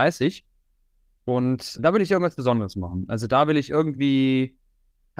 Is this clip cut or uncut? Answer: cut